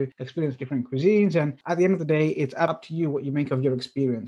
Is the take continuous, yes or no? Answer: yes